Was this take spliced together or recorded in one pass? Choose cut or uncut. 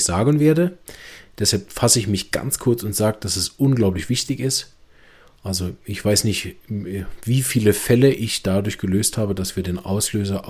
uncut